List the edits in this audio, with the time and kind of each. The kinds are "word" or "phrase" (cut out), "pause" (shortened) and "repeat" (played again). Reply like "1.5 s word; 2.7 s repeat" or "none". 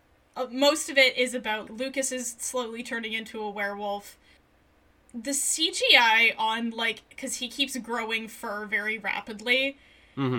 1.7 s word; 4.4 s pause